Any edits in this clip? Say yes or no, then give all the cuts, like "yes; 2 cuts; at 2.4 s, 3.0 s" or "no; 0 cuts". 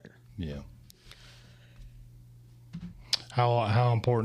no; 0 cuts